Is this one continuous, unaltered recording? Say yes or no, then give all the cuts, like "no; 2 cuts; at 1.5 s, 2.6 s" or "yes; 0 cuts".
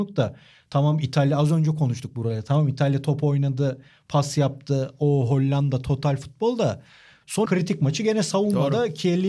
no; 1 cut; at 7.5 s